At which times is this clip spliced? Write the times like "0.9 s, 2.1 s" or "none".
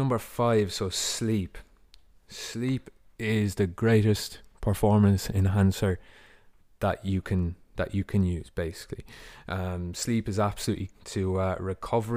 10.9 s

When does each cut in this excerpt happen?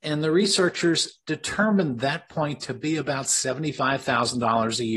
none

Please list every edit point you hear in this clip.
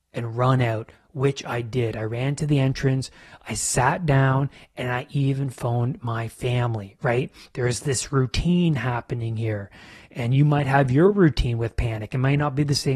none

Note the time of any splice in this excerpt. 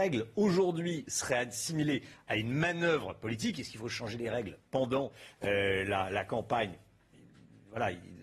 none

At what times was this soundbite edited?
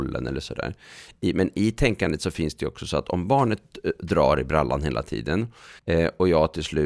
5.8 s

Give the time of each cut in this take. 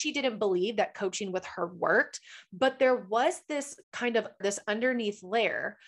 3.8 s, 4.4 s

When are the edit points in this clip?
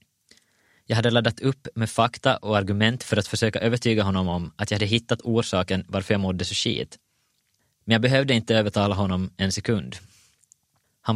none

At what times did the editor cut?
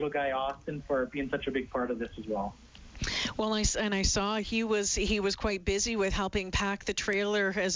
none

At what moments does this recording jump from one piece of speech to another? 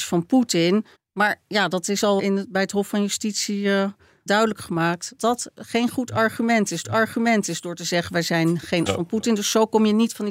0.9 s, 2.2 s, 4.3 s, 5.2 s, 6.8 s, 8.9 s

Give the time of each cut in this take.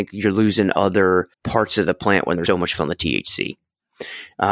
1.3 s, 2.5 s, 2.8 s

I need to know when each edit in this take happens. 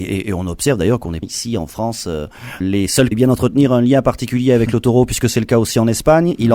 1.2 s, 2.6 s, 3.1 s

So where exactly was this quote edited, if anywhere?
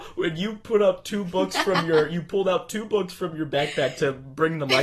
none

